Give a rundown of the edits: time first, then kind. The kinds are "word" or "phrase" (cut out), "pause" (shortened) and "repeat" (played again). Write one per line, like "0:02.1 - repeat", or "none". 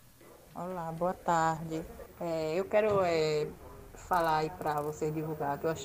0:02.1 - pause